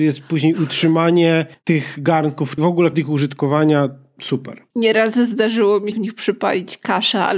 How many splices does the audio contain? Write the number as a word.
five